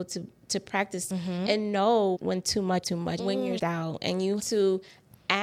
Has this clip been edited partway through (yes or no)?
yes